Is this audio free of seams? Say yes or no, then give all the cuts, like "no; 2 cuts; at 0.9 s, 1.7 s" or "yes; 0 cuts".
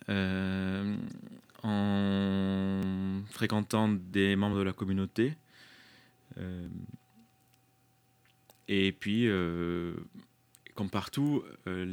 yes; 0 cuts